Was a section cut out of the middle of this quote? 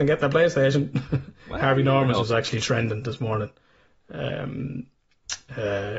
no; 0 cuts

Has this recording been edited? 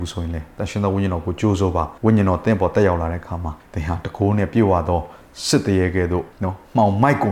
yes; 3 cuts; at 2.0 s, 3.6 s, 6.3 s

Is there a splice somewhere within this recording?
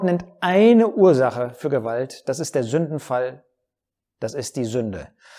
no; 0 cuts

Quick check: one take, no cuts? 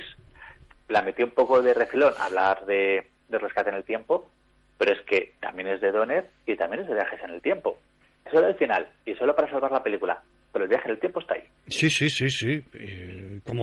yes; 0 cuts

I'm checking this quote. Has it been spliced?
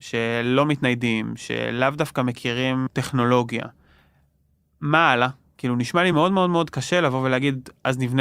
no; 0 cuts

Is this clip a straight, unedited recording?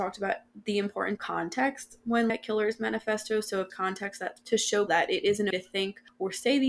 no; 6 cuts; at 1.2 s, 2.3 s, 3.7 s, 4.4 s, 4.9 s, 5.5 s

